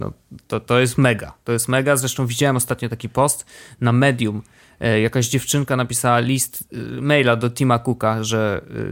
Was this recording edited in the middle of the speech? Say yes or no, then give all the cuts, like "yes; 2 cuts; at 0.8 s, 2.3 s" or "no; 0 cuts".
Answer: no; 0 cuts